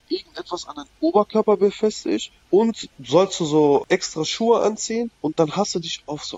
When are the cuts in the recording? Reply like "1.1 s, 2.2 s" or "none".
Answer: 2.4 s, 5.2 s